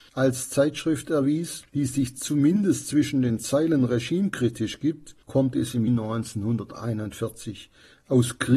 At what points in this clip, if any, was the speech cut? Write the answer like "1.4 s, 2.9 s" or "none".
1.7 s, 5.2 s, 5.9 s